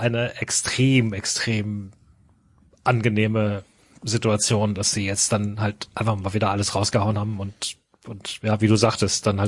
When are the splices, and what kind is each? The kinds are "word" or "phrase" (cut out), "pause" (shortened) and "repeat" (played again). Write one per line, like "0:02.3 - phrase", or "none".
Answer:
none